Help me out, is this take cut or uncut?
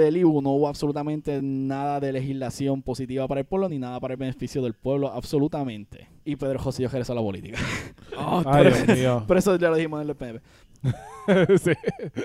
uncut